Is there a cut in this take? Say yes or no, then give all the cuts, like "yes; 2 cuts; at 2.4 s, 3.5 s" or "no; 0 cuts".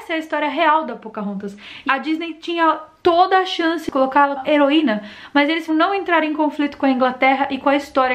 yes; 3 cuts; at 1.9 s, 4.4 s, 5.7 s